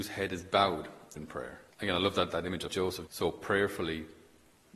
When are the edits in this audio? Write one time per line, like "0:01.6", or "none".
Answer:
0:01.2
0:01.7
0:02.3
0:02.7
0:03.1